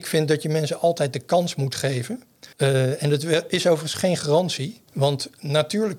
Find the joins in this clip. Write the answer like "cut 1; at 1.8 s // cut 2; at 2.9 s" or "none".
cut 1; at 2.5 s // cut 2; at 4.9 s